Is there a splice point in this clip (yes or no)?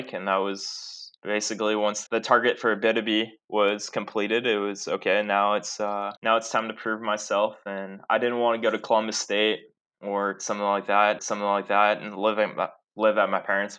yes